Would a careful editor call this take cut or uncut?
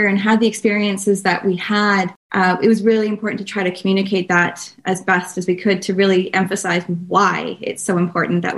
uncut